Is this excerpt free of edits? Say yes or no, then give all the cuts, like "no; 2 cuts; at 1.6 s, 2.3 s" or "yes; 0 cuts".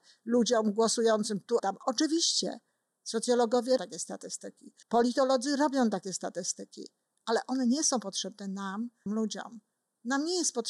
no; 4 cuts; at 1.6 s, 3.8 s, 4.8 s, 9.1 s